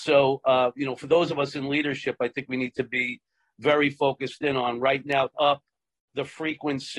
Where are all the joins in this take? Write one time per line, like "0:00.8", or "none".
0:05.3